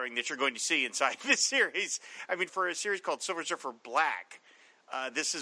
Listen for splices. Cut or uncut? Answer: cut